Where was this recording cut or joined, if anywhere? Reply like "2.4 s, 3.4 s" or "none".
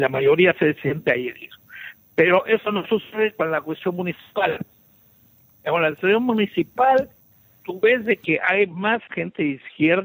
none